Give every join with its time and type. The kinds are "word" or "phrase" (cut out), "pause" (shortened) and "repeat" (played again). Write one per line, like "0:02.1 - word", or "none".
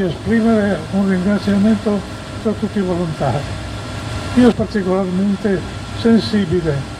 0:02.4 - word
0:04.5 - word